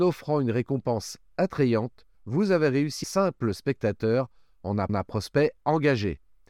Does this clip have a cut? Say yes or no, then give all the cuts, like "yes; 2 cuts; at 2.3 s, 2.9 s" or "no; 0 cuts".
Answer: yes; 3 cuts; at 2.1 s, 3.0 s, 4.9 s